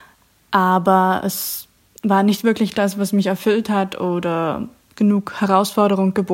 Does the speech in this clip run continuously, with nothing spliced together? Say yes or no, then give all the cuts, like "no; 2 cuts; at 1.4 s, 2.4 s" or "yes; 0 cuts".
yes; 0 cuts